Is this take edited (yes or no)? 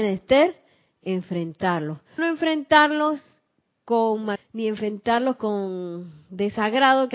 yes